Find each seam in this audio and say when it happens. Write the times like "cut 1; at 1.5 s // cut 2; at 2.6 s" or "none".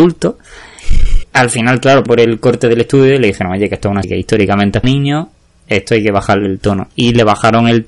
cut 1; at 1.2 s // cut 2; at 2.1 s // cut 3; at 4.0 s // cut 4; at 4.8 s